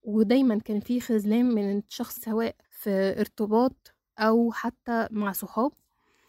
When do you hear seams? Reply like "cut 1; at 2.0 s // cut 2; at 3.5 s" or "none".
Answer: cut 1; at 2.2 s // cut 2; at 2.6 s